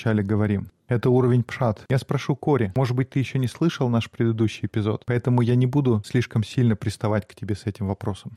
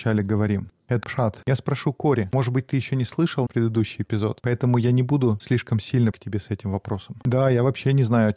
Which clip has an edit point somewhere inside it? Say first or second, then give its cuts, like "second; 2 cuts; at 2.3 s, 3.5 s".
second; 3 cuts; at 1.0 s, 3.5 s, 6.1 s